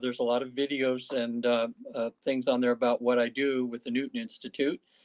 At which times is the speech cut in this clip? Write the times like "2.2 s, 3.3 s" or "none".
none